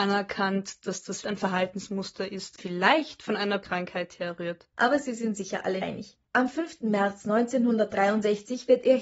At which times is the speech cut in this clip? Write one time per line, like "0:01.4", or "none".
0:01.2
0:02.6
0:03.6
0:05.8
0:06.2